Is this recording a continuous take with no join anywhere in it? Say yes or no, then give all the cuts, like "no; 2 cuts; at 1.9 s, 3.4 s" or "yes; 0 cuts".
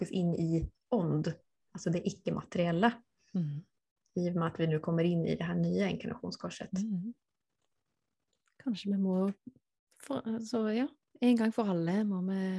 yes; 0 cuts